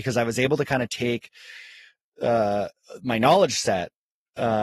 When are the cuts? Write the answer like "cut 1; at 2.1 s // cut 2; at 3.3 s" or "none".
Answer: none